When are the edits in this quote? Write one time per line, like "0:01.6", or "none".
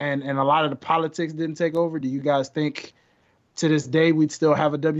none